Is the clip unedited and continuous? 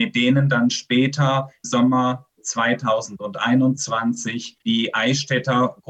no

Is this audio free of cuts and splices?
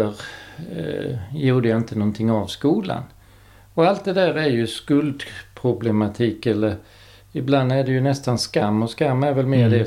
yes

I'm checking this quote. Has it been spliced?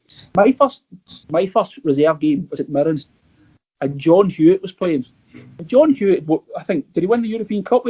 yes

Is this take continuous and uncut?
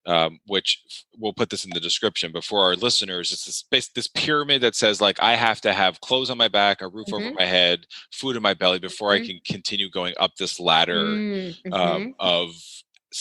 yes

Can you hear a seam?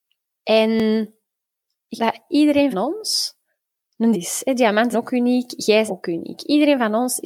yes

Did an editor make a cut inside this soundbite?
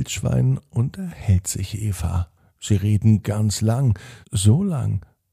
yes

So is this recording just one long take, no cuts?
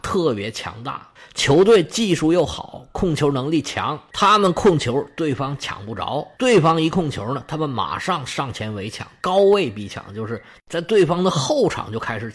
yes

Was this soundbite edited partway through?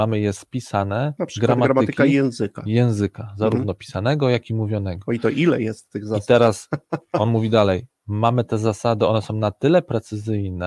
no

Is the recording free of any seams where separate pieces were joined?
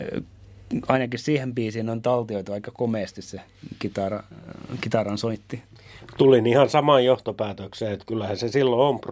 yes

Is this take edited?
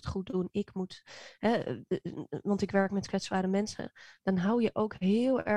no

